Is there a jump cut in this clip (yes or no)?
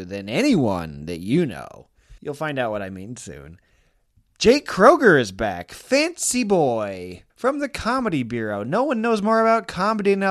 yes